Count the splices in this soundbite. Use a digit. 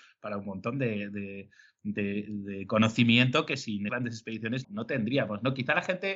2